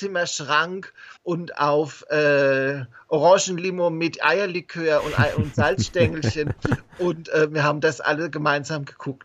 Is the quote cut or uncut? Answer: cut